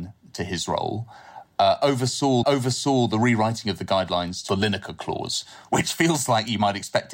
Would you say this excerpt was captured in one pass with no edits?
no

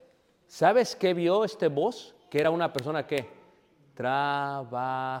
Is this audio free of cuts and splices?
yes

